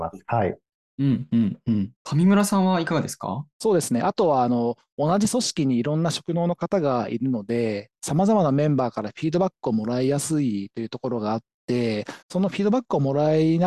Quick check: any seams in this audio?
yes; 3 cuts; at 1.9 s, 3.5 s, 12.2 s

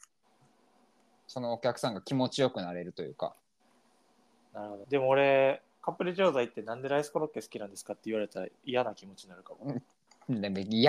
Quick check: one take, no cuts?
no; 1 cut; at 4.8 s

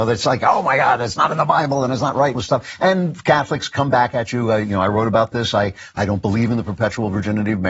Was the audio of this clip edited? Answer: yes; 1 cut; at 2.3 s

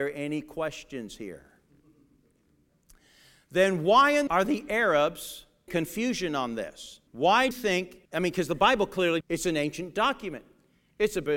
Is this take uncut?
no; 6 cuts; at 4.3 s, 5.7 s, 7.1 s, 7.5 s, 8.1 s, 9.2 s

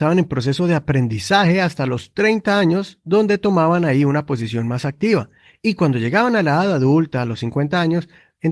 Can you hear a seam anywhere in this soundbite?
no; 0 cuts

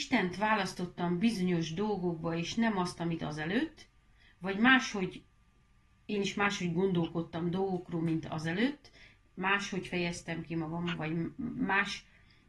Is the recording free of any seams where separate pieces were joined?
yes; 0 cuts

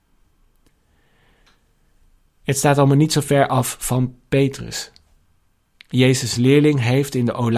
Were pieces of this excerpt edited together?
no; 0 cuts

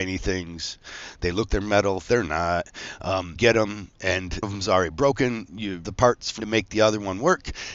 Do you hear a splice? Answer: yes; 5 cuts; at 1.5 s, 3.4 s, 4.4 s, 5.8 s, 6.4 s

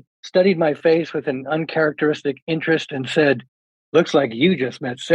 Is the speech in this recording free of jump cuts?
yes; 0 cuts

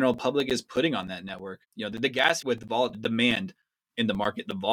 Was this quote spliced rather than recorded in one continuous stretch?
yes; 3 cuts; at 1.6 s, 2.4 s, 2.9 s

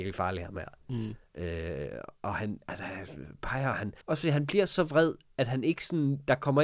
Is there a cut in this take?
yes; 2 cuts; at 1.2 s, 4.0 s

